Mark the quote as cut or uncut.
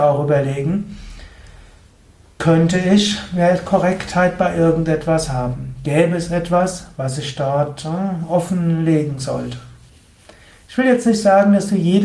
uncut